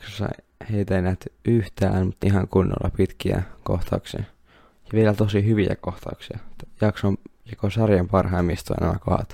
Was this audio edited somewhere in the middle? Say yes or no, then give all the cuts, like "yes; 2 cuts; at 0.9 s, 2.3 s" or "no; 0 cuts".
yes; 1 cut; at 2.2 s